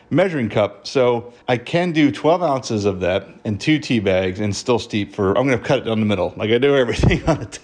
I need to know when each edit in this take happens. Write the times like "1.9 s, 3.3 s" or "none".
1.4 s